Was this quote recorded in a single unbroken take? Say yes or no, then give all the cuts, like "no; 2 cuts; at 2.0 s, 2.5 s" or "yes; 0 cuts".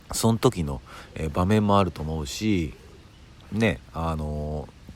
yes; 0 cuts